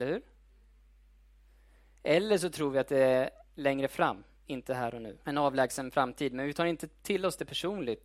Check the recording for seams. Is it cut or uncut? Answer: cut